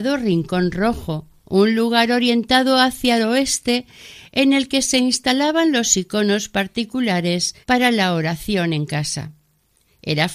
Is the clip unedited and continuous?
no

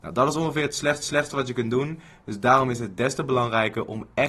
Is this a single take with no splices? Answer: no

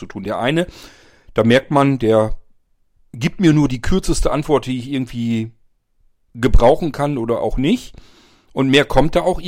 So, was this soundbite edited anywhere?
no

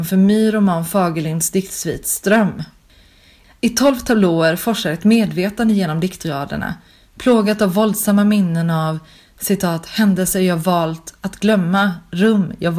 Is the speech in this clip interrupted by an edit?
no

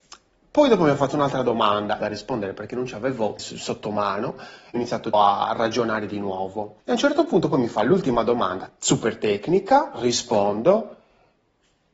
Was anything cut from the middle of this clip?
yes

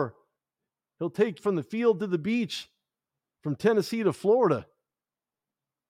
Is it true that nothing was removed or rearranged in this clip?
no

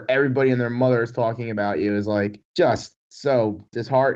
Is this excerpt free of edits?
no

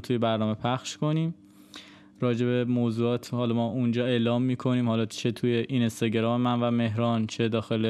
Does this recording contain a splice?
no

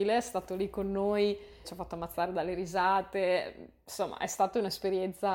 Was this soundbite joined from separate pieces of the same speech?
yes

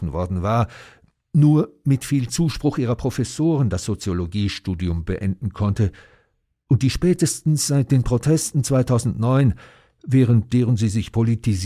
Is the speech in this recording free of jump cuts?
yes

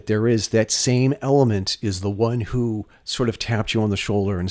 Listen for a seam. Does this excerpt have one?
no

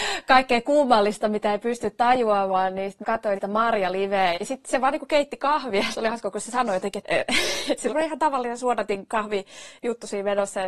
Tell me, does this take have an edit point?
yes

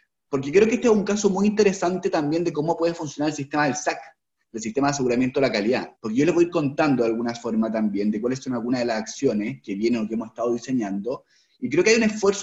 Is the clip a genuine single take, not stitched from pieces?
no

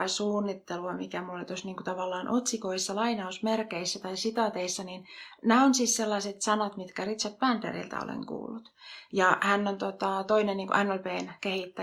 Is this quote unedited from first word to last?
yes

